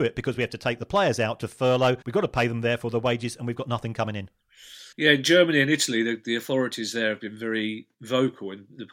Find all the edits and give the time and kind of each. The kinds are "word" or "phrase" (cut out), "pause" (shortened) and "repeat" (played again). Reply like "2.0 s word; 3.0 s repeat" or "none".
2.0 s pause; 4.9 s pause; 7.9 s pause